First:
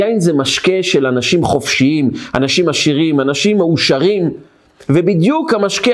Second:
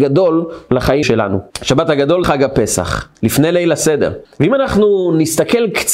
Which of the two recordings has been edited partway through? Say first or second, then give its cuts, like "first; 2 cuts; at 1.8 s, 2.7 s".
second; 5 cuts; at 1.0 s, 1.5 s, 2.2 s, 3.1 s, 4.2 s